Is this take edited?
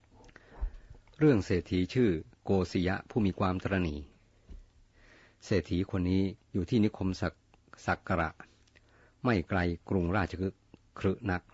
no; 0 cuts

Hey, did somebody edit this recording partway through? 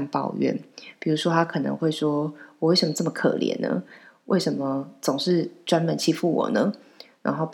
no; 0 cuts

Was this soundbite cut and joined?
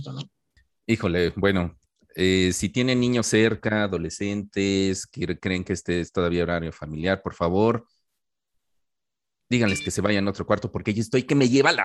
no; 0 cuts

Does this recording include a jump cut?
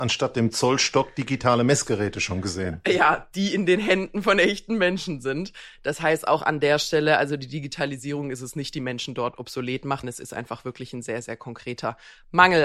yes; 1 cut; at 10.0 s

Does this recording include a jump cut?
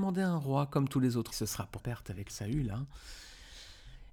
yes; 3 cuts; at 1.3 s, 1.8 s, 2.3 s

